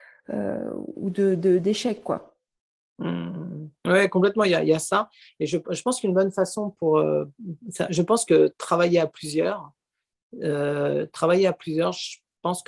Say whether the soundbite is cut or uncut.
uncut